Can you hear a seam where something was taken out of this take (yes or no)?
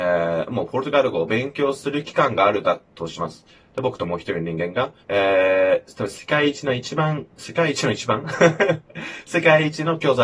yes